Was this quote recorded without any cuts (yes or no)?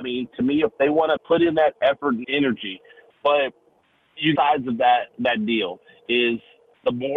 no